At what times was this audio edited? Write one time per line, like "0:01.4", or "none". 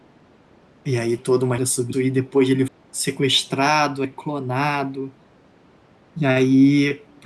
0:01.2
0:01.6
0:01.9
0:02.7
0:04.0